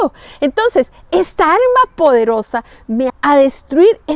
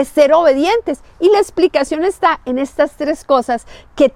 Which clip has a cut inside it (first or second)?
first